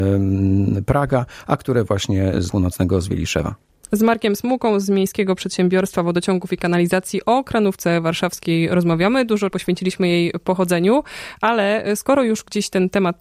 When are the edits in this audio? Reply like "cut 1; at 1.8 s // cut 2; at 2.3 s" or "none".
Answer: cut 1; at 2.5 s // cut 2; at 9.5 s

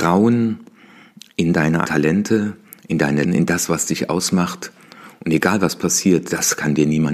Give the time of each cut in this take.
cut 1; at 1.8 s // cut 2; at 3.2 s

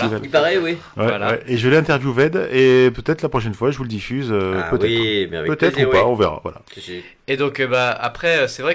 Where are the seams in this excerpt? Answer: none

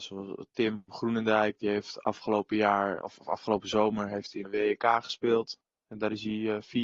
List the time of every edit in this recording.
cut 1; at 3.0 s // cut 2; at 4.4 s

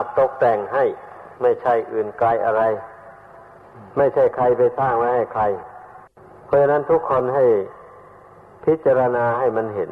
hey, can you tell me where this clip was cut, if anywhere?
cut 1; at 1.4 s // cut 2; at 3.9 s // cut 3; at 6.1 s

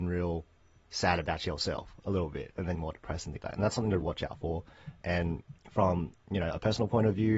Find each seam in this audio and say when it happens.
cut 1; at 2.7 s // cut 2; at 3.4 s // cut 3; at 4.0 s

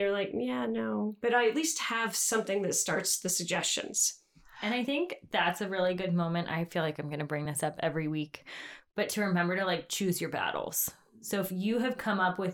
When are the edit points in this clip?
none

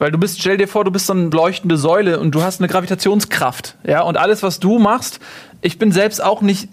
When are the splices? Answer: cut 1; at 1.3 s

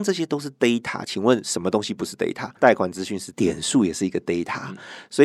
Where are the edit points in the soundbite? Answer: cut 1; at 3.3 s

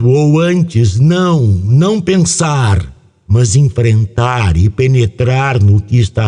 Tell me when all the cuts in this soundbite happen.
none

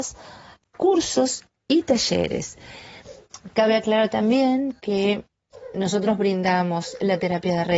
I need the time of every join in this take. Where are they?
none

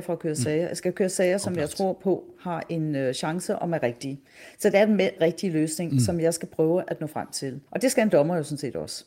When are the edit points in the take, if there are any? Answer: cut 1; at 5.2 s // cut 2; at 7.7 s

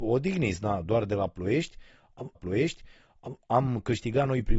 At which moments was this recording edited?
cut 1; at 2.3 s

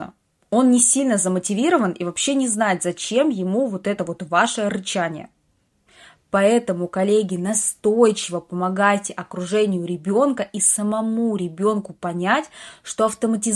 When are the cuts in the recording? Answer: none

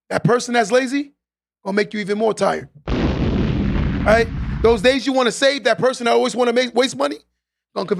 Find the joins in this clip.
none

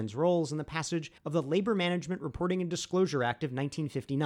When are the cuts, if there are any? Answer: cut 1; at 1.2 s

